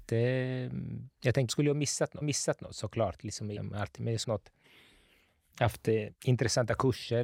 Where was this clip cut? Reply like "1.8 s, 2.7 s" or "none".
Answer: 1.1 s, 1.5 s, 2.2 s, 3.6 s, 4.2 s, 6.1 s